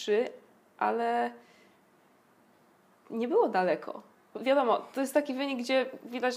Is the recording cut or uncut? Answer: cut